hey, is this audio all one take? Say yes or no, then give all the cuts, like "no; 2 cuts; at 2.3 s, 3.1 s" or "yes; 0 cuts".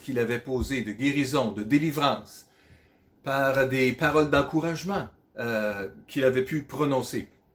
yes; 0 cuts